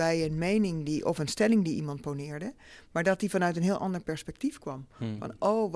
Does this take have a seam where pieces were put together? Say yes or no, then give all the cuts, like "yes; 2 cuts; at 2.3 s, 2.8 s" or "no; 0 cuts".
no; 0 cuts